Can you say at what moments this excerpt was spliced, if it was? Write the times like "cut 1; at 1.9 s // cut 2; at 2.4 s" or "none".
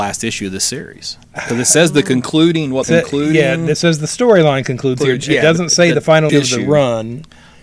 cut 1; at 1.2 s // cut 2; at 2.8 s // cut 3; at 6.3 s